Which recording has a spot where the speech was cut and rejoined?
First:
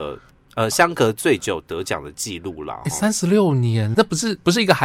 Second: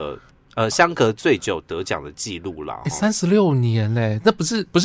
first; 1 cut; at 3.9 s

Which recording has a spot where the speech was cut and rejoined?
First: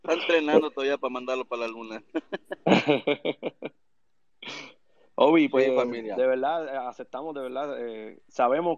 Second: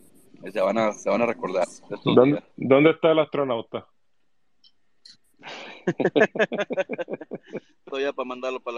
second; 2 cuts; at 2.5 s, 7.9 s

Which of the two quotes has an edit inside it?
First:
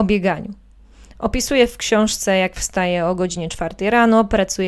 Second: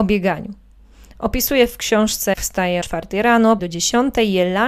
second; 3 cuts; at 2.3 s, 2.8 s, 3.6 s

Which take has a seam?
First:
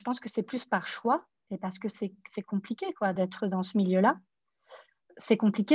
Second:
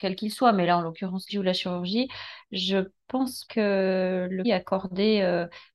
second; 3 cuts; at 1.3 s, 3.5 s, 4.4 s

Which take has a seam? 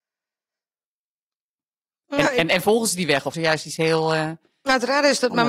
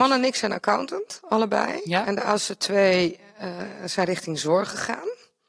first; 1 cut; at 3.3 s

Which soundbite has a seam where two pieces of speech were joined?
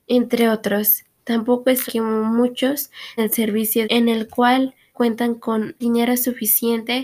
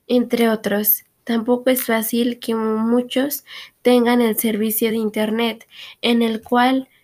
first; 5 cuts; at 1.9 s, 3.2 s, 3.8 s, 4.9 s, 5.8 s

